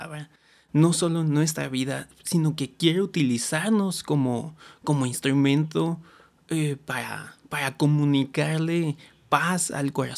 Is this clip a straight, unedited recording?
yes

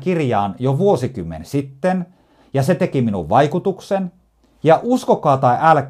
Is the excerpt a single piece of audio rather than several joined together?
yes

